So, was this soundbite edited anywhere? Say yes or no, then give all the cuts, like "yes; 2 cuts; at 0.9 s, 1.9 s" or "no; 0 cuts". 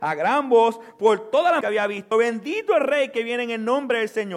yes; 2 cuts; at 1.6 s, 2.1 s